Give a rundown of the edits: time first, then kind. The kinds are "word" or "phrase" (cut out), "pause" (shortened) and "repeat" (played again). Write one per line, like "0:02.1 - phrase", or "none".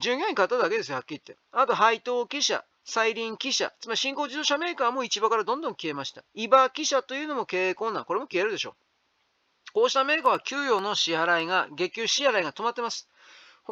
0:01.4 - pause
0:06.3 - pause